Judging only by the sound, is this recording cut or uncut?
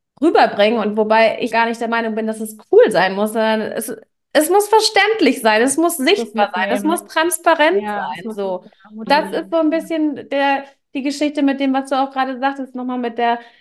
cut